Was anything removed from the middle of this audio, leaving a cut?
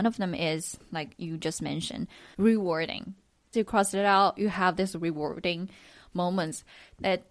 no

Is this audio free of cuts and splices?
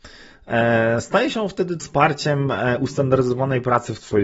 no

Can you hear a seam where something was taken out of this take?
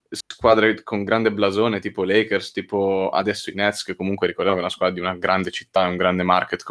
no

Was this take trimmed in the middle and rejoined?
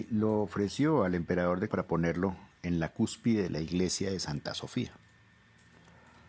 yes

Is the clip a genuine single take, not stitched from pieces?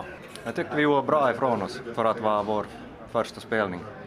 yes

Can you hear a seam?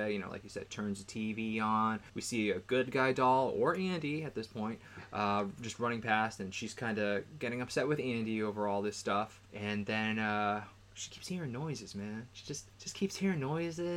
yes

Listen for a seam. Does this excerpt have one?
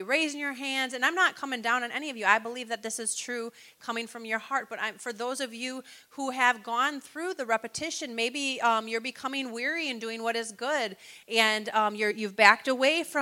no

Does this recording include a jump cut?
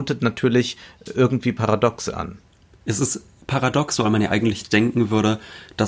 no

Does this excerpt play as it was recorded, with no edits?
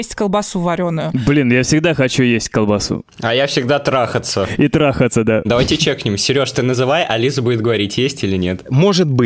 yes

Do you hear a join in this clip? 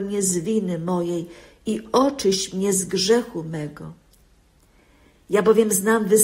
no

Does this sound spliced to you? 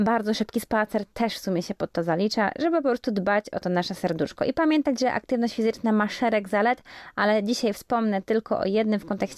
no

